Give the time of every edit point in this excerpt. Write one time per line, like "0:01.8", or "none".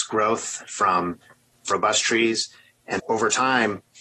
0:01.7
0:03.0